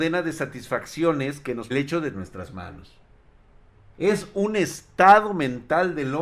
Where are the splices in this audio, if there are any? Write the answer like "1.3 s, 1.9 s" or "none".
1.7 s, 2.1 s, 3.9 s